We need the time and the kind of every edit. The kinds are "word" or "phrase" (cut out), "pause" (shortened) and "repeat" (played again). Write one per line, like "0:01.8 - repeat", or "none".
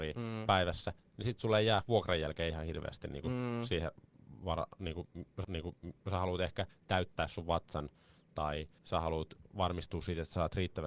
0:05.4 - repeat
0:08.8 - pause